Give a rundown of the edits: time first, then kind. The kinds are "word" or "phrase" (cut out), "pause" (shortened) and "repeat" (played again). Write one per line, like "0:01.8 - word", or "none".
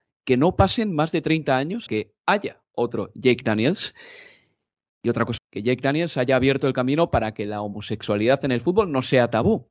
0:01.9 - word
0:05.4 - word